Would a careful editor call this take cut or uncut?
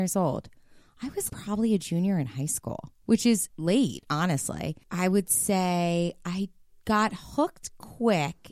cut